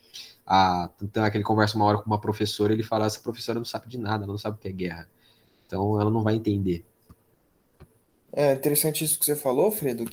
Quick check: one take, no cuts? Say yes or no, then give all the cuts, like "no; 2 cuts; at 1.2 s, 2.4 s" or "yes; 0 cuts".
yes; 0 cuts